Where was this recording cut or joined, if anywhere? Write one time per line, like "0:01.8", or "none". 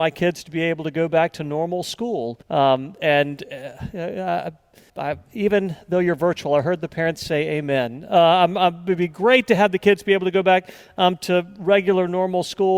0:02.4
0:04.9

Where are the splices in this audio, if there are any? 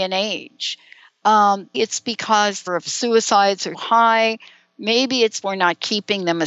0:01.7
0:02.7
0:03.7
0:05.4

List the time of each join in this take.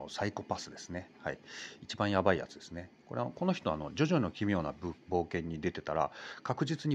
none

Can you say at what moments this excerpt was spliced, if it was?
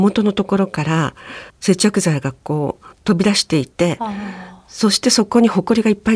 0:01.5
0:02.9

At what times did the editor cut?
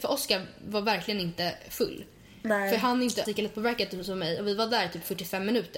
0:03.3

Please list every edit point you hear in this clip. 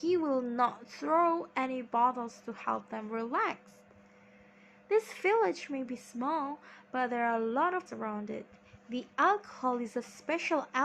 0:07.9

